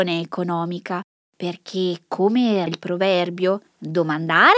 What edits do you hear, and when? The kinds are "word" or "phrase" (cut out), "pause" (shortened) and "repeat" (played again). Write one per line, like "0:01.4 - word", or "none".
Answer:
0:01.3 - pause
0:02.7 - word
0:03.7 - pause